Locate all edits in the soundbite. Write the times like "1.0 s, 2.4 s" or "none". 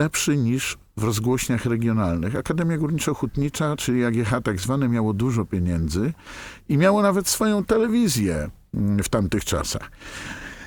none